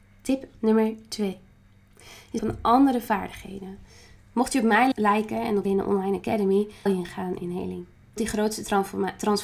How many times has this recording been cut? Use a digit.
5